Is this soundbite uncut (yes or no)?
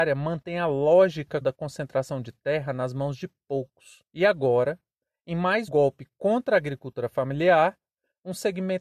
no